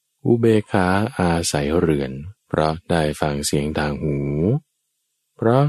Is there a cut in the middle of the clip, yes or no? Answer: yes